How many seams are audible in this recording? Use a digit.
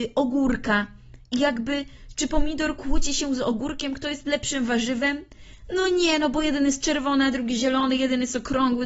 0